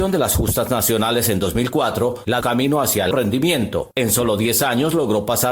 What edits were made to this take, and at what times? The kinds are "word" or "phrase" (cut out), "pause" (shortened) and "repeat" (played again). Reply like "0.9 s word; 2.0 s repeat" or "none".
2.4 s phrase; 3.1 s word